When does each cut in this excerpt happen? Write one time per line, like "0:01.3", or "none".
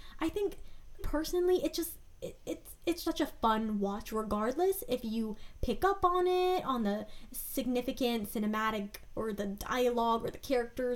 0:01.0
0:03.0